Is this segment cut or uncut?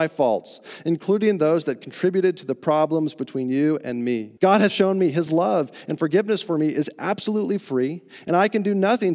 cut